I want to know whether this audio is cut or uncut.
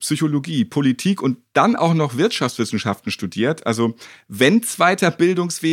uncut